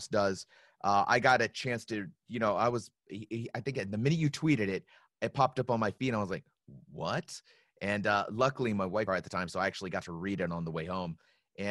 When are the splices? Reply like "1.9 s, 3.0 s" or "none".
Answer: 9.1 s